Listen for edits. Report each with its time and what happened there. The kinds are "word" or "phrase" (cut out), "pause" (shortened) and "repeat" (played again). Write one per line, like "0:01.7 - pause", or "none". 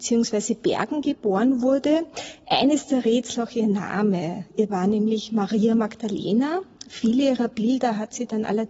0:03.3 - word
0:04.7 - word